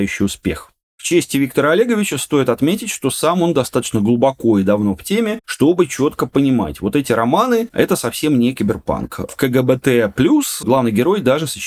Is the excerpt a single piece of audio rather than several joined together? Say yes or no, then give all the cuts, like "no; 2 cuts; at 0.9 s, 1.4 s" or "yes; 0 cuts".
yes; 0 cuts